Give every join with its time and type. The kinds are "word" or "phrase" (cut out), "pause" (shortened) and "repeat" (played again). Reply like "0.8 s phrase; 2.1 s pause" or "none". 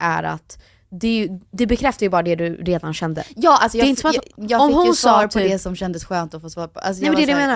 none